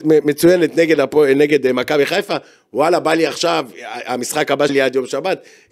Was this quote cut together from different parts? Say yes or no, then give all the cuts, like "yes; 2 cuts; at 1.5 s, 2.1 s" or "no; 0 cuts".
yes; 1 cut; at 4.7 s